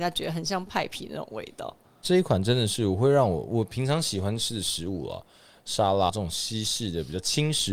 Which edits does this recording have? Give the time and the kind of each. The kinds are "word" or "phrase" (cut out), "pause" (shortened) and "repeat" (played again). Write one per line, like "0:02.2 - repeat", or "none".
0:06.1 - word